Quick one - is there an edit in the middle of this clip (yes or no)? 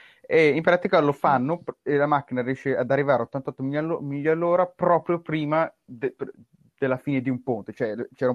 no